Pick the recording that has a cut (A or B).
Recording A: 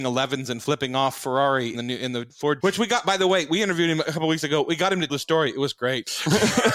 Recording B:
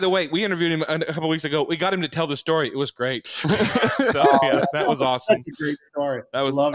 A